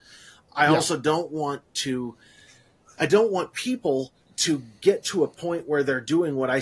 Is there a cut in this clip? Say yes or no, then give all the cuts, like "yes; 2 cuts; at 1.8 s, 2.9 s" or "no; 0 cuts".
no; 0 cuts